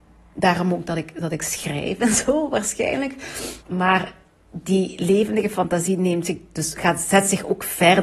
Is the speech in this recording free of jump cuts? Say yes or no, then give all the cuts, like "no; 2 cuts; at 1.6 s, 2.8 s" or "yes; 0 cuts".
no; 1 cut; at 3.6 s